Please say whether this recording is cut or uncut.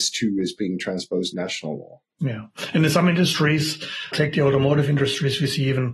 cut